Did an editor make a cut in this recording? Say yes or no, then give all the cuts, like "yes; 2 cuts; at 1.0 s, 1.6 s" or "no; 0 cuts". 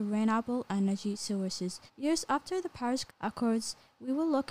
yes; 2 cuts; at 1.9 s, 3.1 s